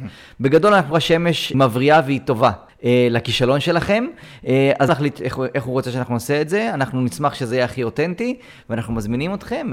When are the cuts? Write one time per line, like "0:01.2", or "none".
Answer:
0:00.9
0:01.5
0:02.7
0:04.9

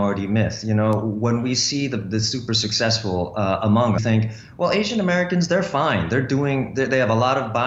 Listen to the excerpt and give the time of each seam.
0:04.0

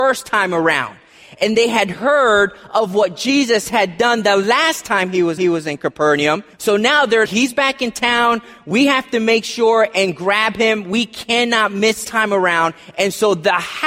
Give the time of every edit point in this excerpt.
0:05.4
0:06.5
0:07.3
0:12.0

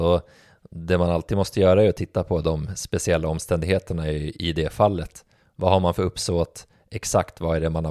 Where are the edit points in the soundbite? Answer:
none

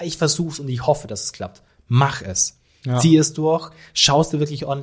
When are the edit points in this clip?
none

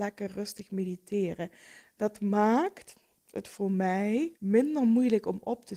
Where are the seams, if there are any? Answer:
0:03.2
0:04.4

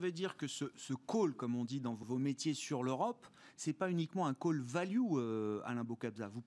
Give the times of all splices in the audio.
0:02.0

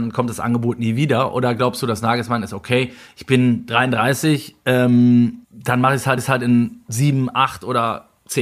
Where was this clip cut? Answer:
0:05.4
0:06.2

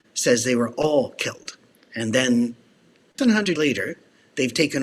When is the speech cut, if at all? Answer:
0:01.7
0:03.2
0:03.6

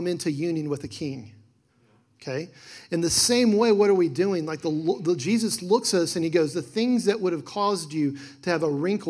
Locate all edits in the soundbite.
none

